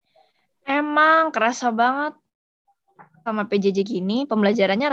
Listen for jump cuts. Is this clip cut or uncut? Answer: uncut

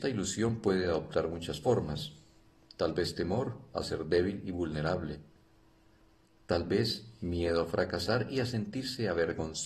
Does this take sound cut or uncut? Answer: uncut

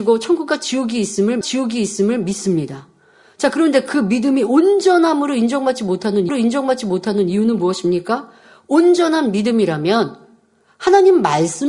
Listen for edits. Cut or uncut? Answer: cut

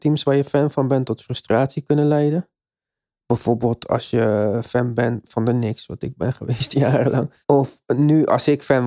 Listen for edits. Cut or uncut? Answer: cut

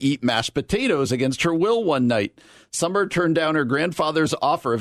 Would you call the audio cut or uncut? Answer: uncut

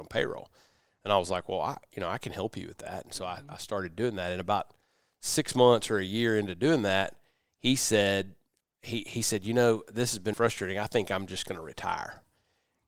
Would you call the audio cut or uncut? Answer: cut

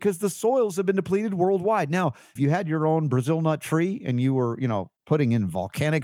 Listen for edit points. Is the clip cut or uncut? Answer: cut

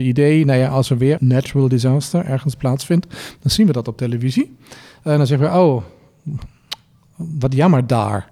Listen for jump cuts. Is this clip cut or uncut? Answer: cut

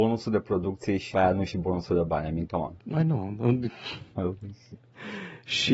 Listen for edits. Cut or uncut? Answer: cut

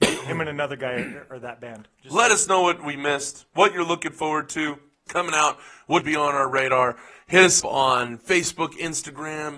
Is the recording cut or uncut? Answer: cut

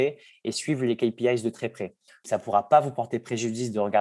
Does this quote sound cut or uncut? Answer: uncut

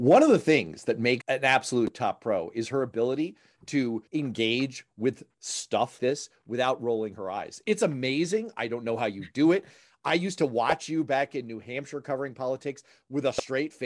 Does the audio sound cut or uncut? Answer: cut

